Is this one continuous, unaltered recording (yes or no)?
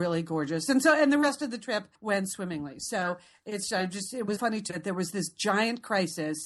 no